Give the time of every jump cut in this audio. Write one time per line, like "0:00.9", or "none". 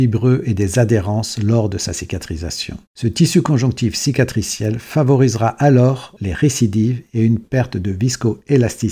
0:02.9